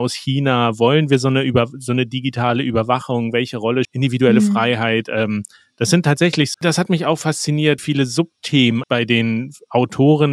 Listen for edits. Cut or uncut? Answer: cut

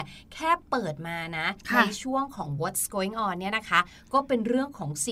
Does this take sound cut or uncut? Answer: uncut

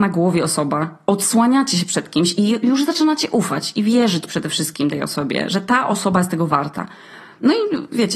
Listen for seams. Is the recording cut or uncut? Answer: uncut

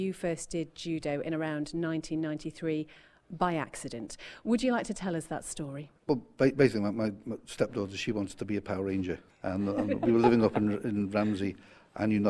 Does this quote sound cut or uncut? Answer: cut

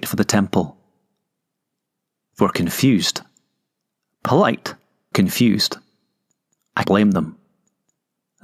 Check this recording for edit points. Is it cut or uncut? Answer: cut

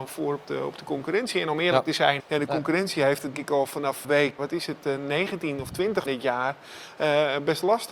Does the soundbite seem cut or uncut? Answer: cut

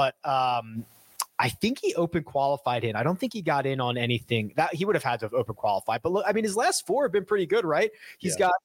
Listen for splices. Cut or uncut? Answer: uncut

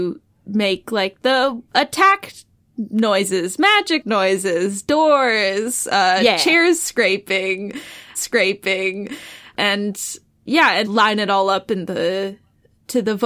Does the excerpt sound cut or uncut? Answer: cut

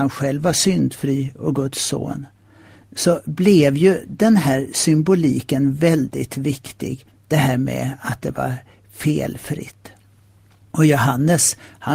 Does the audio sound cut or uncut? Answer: uncut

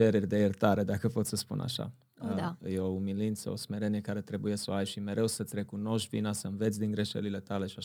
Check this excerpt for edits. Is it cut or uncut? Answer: uncut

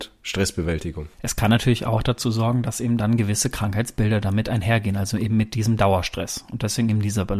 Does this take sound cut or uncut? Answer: uncut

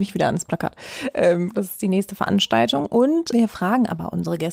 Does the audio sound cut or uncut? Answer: cut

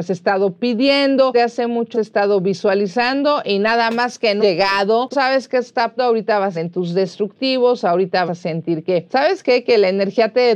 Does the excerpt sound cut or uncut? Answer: cut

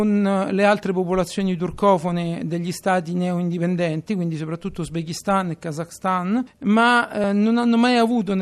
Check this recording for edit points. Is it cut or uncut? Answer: uncut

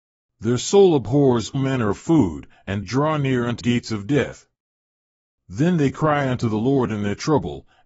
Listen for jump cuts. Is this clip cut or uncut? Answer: cut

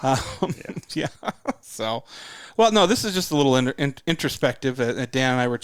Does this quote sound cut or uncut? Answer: uncut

